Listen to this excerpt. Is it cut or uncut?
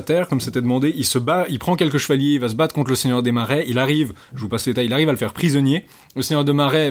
uncut